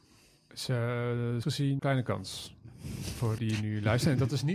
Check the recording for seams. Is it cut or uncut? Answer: cut